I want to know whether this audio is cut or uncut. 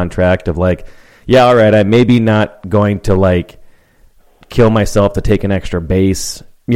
uncut